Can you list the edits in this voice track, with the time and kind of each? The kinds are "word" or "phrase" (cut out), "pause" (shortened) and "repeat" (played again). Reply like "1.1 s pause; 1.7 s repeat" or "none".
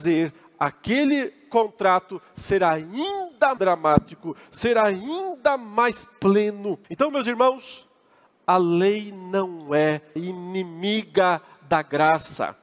3.6 s word; 6.8 s pause; 10.2 s word